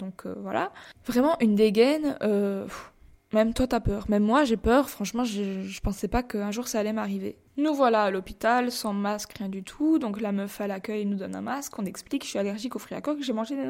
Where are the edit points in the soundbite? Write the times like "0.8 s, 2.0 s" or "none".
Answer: none